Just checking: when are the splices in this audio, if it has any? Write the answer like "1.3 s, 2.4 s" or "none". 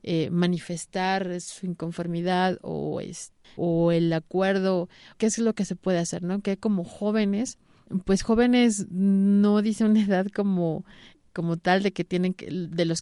none